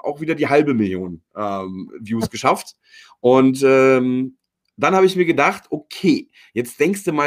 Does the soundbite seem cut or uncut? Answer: uncut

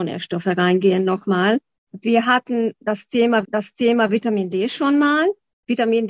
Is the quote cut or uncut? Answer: cut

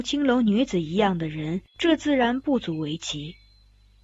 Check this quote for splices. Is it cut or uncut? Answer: cut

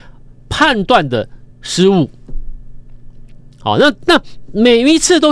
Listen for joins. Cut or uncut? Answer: cut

